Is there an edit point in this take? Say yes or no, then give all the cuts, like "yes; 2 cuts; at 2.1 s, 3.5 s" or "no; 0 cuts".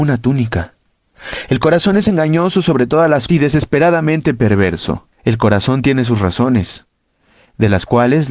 yes; 2 cuts; at 3.3 s, 5.1 s